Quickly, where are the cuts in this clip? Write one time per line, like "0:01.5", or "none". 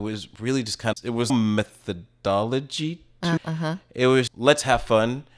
0:00.9
0:01.3
0:03.4
0:04.3